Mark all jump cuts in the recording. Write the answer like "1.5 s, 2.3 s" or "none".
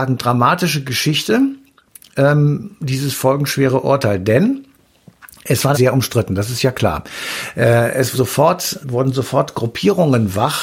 2.8 s, 5.7 s, 8.1 s, 8.8 s

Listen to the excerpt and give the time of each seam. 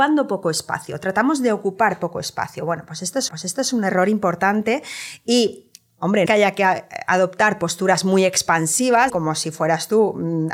3.3 s, 6.3 s, 9.1 s

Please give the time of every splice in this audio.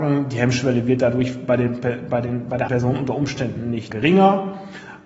2.7 s, 3.9 s

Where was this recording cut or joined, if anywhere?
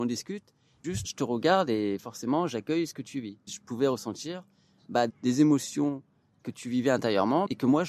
1.0 s, 3.5 s, 5.1 s

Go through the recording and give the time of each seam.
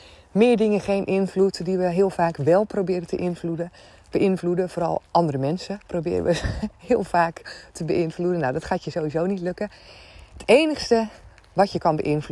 5.8 s

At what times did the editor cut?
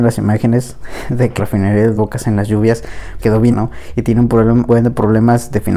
1.4 s, 1.9 s, 3.2 s, 3.5 s, 4.7 s

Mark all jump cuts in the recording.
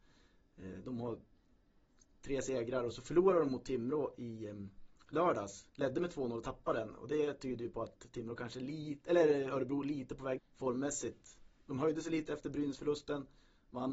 10.4 s

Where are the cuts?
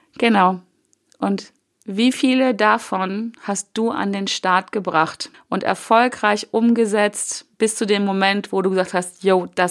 5.3 s, 7.5 s

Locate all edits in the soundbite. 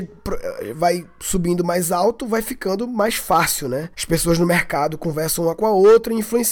3.9 s

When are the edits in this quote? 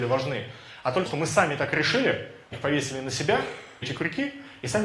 1.1 s, 2.5 s, 3.8 s

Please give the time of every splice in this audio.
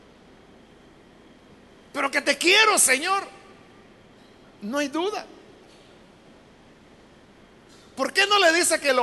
none

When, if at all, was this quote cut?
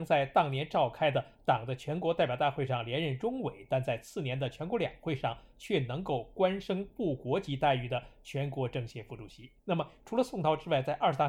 9.6 s

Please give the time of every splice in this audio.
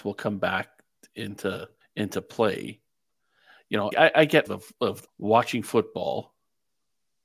1.8 s, 3.9 s, 4.5 s, 5.1 s

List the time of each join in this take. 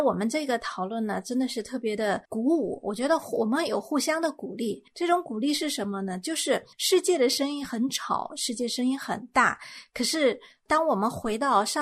2.2 s, 4.9 s, 6.7 s

